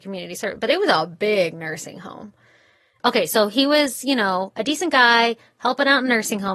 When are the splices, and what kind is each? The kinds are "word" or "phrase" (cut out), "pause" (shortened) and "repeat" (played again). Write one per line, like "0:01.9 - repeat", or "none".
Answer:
none

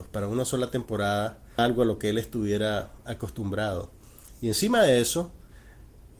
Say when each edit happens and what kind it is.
0:01.6 - phrase

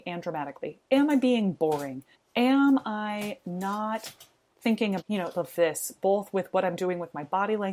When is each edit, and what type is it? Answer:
0:02.1 - pause
0:05.0 - word
0:05.3 - phrase

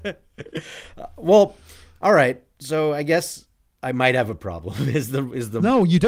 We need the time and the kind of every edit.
none

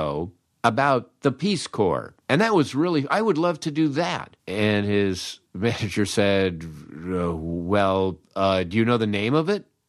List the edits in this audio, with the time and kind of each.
0:02.2 - pause
0:04.4 - pause

